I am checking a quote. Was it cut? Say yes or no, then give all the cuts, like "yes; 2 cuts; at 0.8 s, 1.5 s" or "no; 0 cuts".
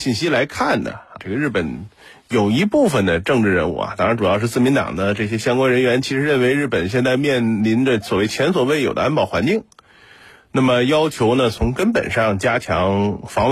yes; 1 cut; at 1.2 s